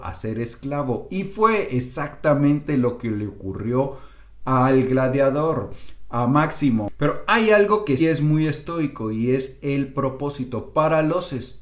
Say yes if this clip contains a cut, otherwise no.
yes